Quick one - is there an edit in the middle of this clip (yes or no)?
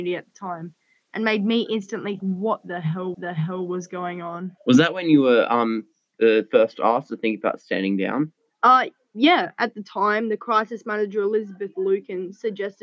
yes